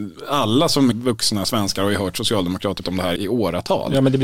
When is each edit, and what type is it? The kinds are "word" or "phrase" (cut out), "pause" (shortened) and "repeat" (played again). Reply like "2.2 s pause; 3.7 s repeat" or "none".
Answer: 0.9 s word; 2.8 s word; 3.2 s word